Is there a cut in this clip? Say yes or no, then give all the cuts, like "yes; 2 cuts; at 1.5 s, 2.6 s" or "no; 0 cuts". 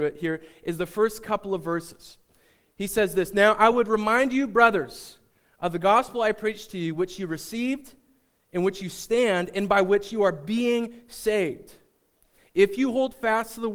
no; 0 cuts